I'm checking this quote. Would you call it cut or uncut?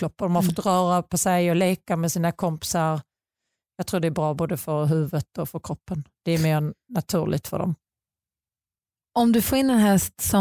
uncut